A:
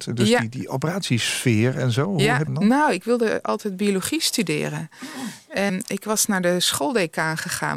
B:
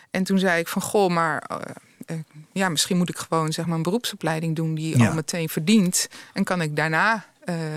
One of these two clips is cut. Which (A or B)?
A